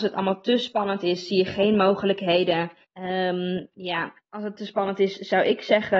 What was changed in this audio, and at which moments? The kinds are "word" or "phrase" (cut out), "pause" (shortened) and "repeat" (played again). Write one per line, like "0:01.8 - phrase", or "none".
0:02.8 - pause
0:04.2 - pause